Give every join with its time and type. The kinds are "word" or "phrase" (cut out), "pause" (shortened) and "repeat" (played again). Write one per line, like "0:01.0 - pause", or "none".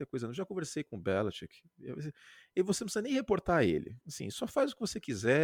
0:04.0 - pause